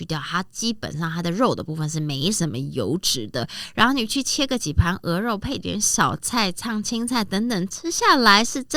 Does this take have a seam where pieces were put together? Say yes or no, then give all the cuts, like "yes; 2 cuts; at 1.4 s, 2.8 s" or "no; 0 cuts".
no; 0 cuts